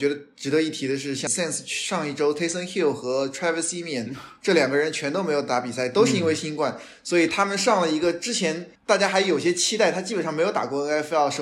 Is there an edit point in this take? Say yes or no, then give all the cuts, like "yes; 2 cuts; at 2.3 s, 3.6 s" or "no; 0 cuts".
yes; 2 cuts; at 1.3 s, 8.8 s